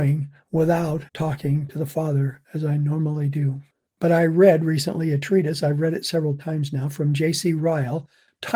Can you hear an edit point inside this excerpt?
yes; 3 cuts; at 1.1 s, 2.4 s, 3.9 s

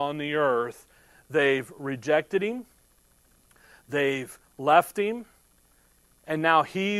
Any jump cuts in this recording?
no; 0 cuts

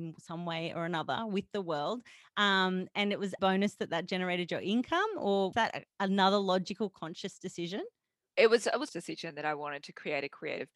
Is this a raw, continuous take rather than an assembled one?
no; 3 cuts; at 3.4 s, 5.5 s, 8.9 s

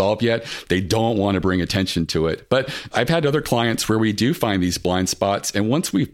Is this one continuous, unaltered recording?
yes; 0 cuts

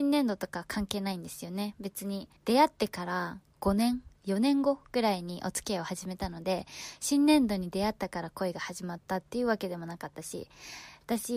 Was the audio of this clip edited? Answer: yes; 3 cuts; at 2.4 s, 3.5 s, 4.2 s

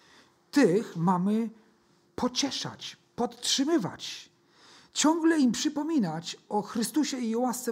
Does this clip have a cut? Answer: no; 0 cuts

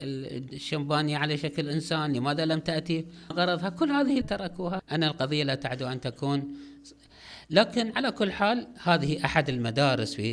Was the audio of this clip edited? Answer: yes; 3 cuts; at 3.3 s, 4.2 s, 4.8 s

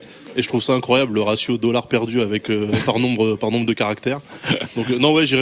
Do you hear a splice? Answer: no; 0 cuts

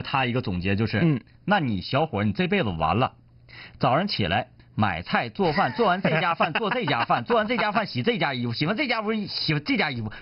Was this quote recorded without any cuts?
yes; 0 cuts

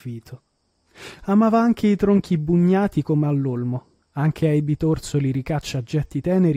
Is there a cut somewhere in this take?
no; 0 cuts

